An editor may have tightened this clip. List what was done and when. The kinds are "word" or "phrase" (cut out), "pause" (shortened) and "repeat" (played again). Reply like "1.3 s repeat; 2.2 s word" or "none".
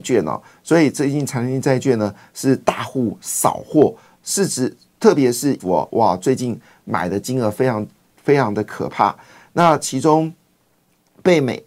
5.6 s word

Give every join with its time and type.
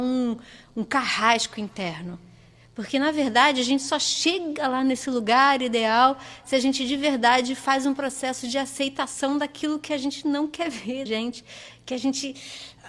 11.1 s phrase

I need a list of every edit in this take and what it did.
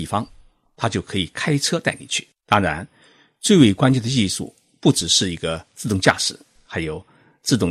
2.3 s pause

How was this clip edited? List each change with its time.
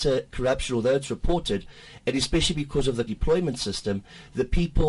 3.1 s word

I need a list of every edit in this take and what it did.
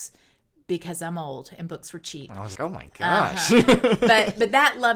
2.5 s word

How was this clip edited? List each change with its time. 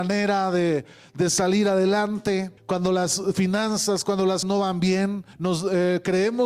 2.6 s pause; 4.4 s word; 5.3 s pause

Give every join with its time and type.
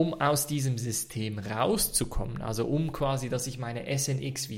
none

